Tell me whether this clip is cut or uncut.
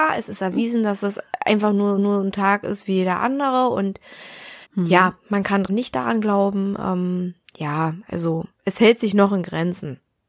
cut